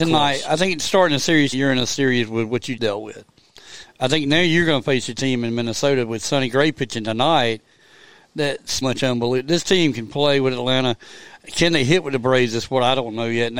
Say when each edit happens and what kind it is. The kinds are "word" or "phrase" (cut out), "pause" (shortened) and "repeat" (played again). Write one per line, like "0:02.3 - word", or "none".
0:01.5 - word
0:02.8 - word
0:08.8 - word